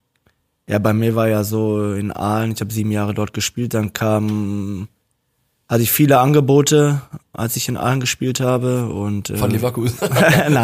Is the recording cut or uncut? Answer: uncut